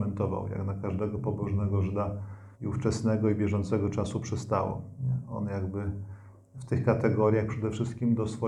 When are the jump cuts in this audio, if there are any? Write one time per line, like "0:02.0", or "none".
0:02.5